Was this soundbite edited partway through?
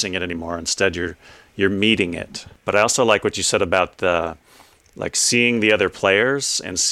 no; 0 cuts

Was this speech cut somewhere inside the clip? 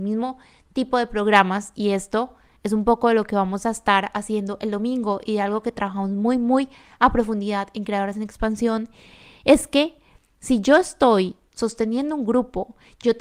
no; 0 cuts

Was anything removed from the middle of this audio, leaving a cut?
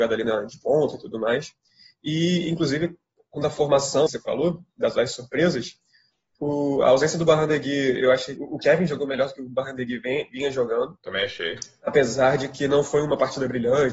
yes; 2 cuts; at 4.1 s, 8.3 s

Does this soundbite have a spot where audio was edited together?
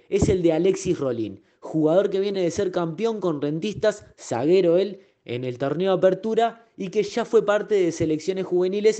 no; 0 cuts

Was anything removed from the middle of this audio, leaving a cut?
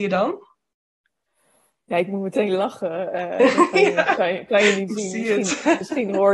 no; 0 cuts

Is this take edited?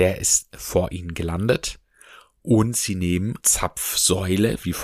yes; 1 cut; at 3.4 s

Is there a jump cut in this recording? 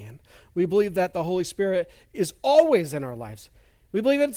no; 0 cuts

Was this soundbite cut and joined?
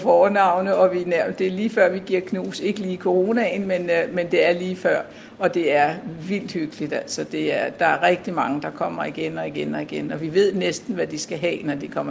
no; 0 cuts

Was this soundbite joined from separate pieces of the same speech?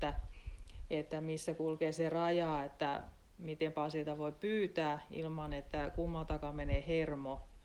no; 0 cuts

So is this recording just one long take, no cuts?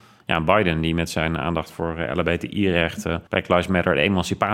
no; 1 cut; at 3.3 s

